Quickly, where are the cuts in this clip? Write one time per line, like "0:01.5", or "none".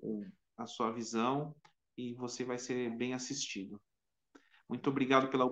none